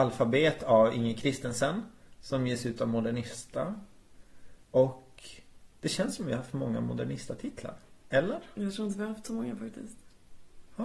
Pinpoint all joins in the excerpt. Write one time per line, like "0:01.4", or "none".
none